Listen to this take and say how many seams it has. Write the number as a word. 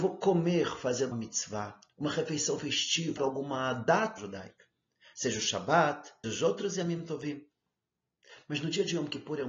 four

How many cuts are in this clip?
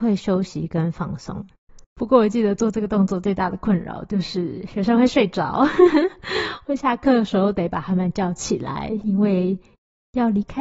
one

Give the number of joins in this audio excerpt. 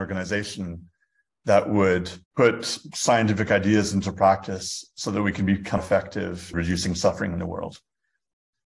three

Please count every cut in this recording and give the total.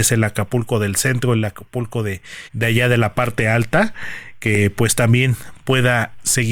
one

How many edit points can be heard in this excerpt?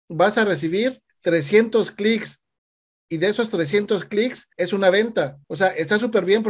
three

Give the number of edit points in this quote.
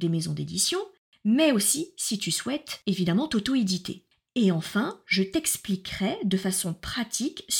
zero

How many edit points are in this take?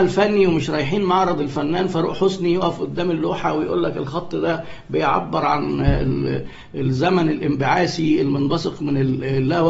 zero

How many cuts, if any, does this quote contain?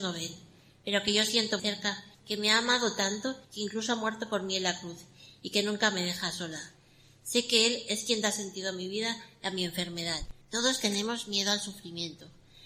four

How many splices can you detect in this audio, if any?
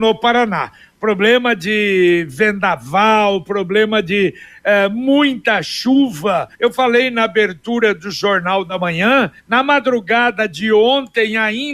two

